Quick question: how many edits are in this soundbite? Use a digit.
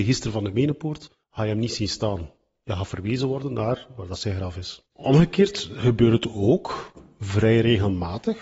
0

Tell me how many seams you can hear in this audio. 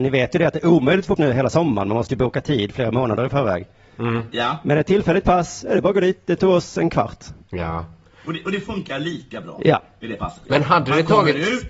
2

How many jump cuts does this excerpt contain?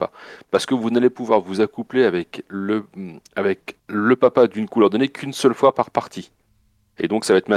1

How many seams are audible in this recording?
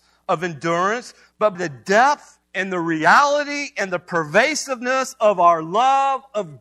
2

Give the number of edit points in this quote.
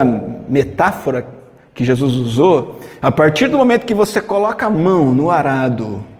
0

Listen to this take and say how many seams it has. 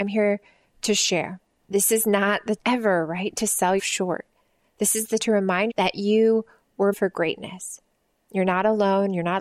6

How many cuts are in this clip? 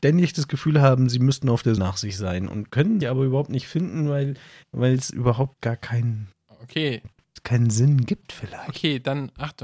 2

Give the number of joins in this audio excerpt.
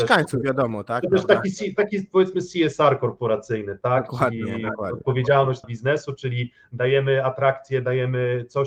1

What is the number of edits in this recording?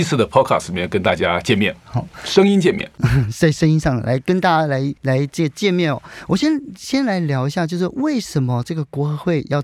1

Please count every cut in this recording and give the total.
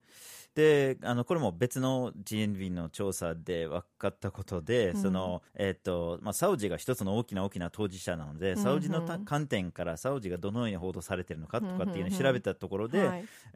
1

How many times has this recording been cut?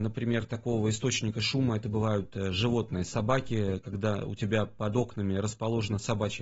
0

